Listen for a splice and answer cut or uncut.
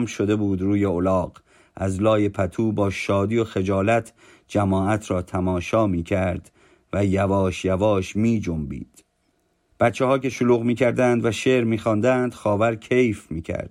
uncut